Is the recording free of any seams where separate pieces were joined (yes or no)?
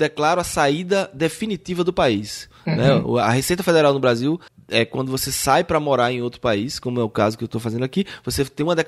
no